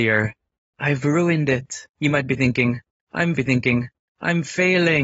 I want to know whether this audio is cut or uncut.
cut